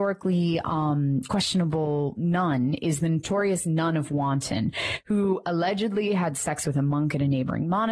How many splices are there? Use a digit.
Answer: 0